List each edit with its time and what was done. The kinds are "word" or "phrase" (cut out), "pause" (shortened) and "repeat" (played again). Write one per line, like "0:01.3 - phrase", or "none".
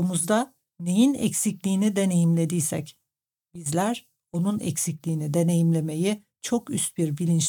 none